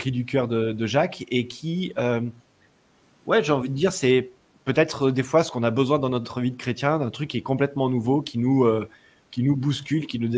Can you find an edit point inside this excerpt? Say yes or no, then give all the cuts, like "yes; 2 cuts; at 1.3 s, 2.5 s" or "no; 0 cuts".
no; 0 cuts